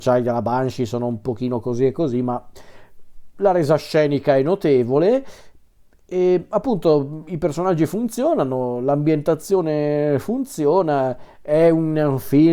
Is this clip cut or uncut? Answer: uncut